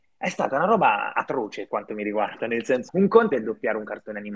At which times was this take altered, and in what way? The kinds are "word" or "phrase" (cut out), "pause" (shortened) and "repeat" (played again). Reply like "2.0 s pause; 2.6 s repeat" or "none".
1.7 s word; 2.9 s word; 3.3 s word